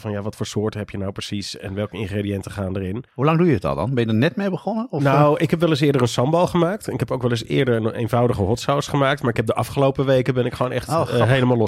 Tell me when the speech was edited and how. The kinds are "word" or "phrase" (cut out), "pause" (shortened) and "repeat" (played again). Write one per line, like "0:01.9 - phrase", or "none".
0:03.1 - pause
0:07.9 - phrase